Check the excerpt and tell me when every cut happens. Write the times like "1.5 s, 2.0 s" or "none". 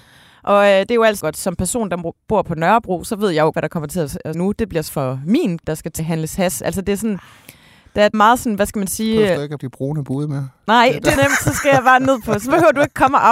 1.2 s, 3.5 s, 4.3 s, 4.9 s, 5.6 s, 6.0 s, 8.1 s, 9.6 s, 11.2 s